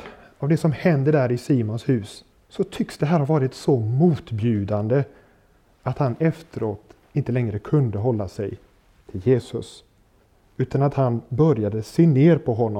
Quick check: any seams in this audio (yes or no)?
yes